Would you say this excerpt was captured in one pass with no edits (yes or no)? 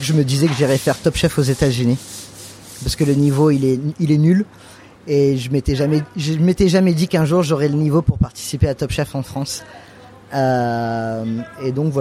yes